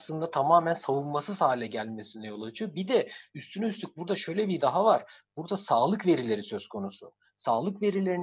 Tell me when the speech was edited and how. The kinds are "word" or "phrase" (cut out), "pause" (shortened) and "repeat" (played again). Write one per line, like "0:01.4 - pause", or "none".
0:04.6 - word

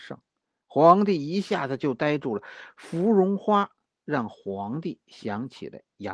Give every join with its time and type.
none

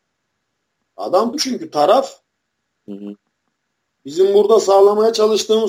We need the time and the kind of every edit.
0:01.3 - word

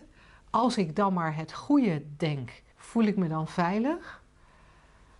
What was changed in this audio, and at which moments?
0:02.7 - pause

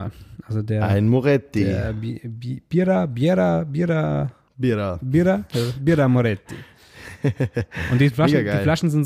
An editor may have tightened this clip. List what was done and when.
0:04.5 - pause

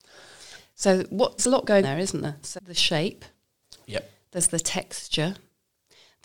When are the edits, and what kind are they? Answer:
0:01.4 - word
0:01.8 - word
0:02.6 - word

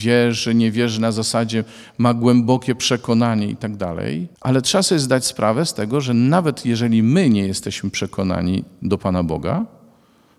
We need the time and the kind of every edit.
0:04.4 - pause

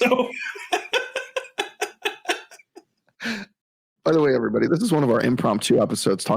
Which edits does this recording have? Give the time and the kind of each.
none

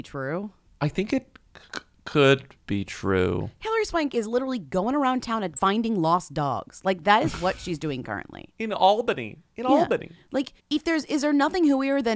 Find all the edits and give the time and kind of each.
0:01.7 - pause
0:02.6 - pause
0:08.5 - pause
0:10.6 - pause

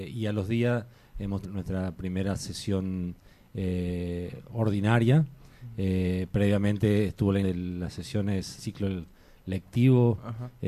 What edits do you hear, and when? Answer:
0:01.4 - word
0:07.4 - word
0:08.6 - word

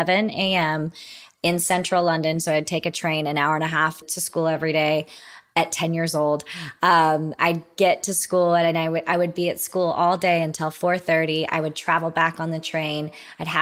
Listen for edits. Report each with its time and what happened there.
0:04.0 - word

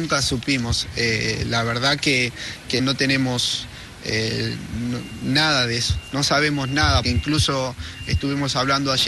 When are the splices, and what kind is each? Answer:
0:02.8 - word
0:07.0 - word

